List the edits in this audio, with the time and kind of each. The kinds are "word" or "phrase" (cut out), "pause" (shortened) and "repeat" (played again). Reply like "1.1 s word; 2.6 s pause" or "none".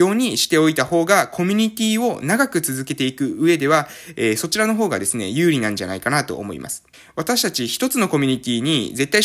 6.9 s pause